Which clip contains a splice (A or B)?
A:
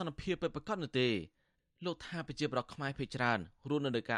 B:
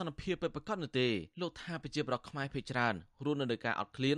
B